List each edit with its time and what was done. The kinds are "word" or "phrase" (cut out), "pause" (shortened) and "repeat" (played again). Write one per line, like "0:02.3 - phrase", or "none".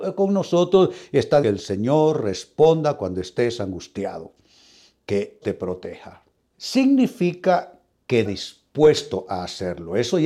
0:01.4 - word
0:05.4 - word
0:06.4 - pause
0:08.3 - phrase